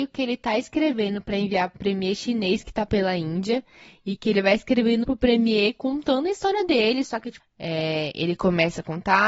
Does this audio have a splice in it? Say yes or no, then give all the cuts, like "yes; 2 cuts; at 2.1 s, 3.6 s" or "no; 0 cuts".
yes; 4 cuts; at 1.7 s, 2.9 s, 5.0 s, 7.4 s